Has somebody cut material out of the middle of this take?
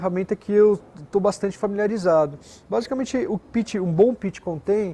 yes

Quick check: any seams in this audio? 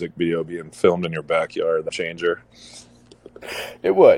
yes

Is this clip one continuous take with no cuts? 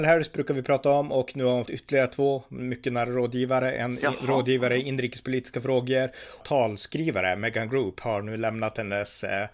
no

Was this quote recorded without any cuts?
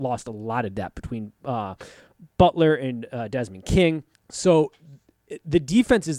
no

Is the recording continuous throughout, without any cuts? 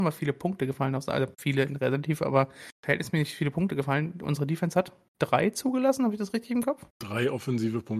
no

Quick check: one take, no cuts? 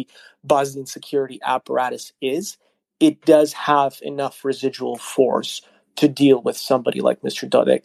yes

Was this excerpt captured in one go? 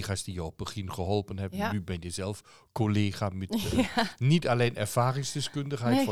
yes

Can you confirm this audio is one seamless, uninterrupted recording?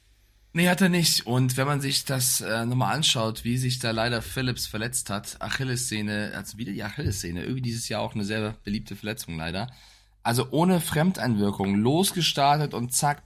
yes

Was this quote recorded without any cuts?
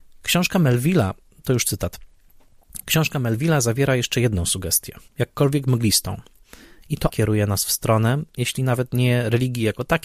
no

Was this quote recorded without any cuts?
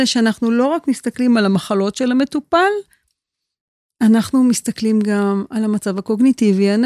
yes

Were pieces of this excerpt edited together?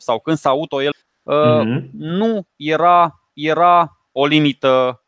yes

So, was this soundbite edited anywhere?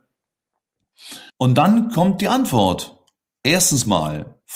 yes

